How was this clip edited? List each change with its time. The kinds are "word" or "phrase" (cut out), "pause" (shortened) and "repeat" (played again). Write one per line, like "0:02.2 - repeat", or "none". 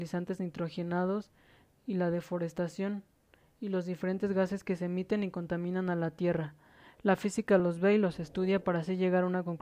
none

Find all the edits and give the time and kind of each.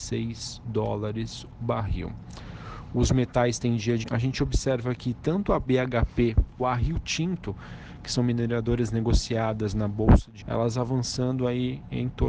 0:01.5 - word
0:04.0 - phrase
0:06.6 - word
0:10.4 - word

